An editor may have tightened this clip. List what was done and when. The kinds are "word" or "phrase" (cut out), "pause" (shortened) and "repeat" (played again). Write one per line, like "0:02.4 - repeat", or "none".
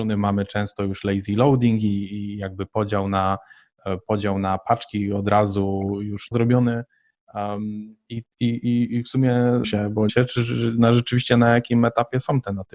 0:06.3 - phrase
0:08.3 - pause
0:09.6 - phrase
0:10.1 - phrase